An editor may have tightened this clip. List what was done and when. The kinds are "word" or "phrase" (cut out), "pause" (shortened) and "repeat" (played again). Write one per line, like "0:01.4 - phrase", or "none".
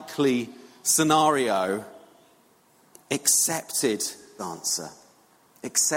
0:04.4 - word